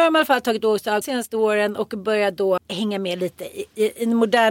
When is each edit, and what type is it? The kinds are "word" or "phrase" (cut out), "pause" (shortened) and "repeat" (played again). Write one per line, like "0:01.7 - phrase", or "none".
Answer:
0:01.0 - word
0:02.6 - word